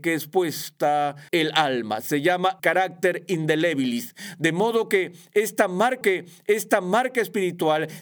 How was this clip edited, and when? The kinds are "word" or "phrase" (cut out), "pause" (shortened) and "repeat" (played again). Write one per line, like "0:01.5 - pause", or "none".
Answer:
0:01.3 - word
0:02.6 - word
0:06.0 - repeat